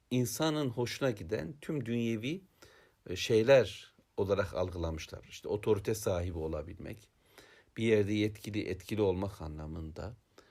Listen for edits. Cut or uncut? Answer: uncut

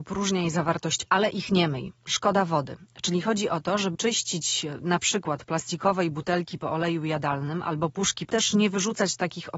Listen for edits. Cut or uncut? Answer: cut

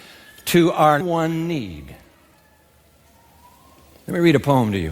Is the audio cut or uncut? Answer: cut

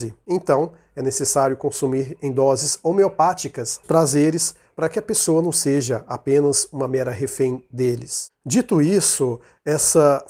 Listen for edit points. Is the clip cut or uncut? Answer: cut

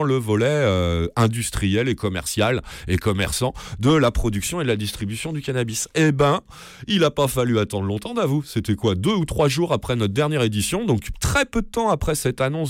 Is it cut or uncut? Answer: uncut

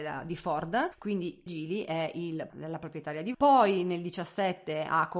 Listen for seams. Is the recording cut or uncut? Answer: cut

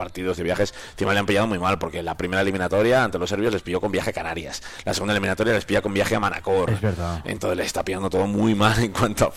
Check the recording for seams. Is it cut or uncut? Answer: uncut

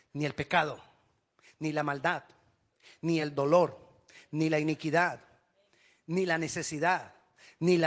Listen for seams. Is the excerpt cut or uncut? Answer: uncut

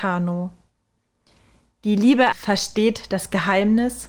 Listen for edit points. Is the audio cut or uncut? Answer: cut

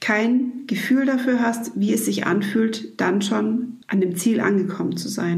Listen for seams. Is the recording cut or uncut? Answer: cut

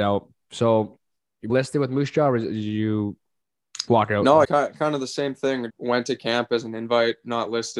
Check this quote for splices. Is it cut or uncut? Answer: cut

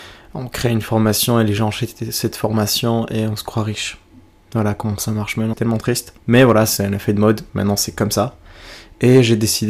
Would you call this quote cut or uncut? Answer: cut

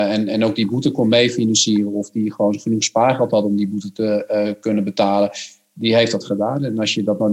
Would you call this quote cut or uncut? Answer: uncut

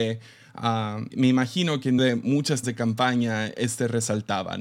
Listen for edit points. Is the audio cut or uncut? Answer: cut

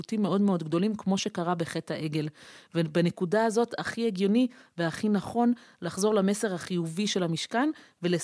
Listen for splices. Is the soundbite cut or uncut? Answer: uncut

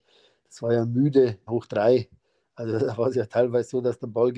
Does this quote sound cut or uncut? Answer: cut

